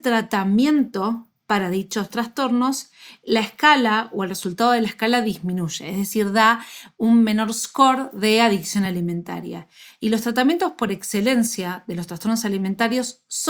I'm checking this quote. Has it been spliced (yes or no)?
no